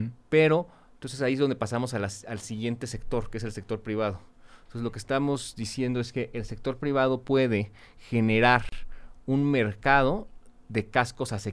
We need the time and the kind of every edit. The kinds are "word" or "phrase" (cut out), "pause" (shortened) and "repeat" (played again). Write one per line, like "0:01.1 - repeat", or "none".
none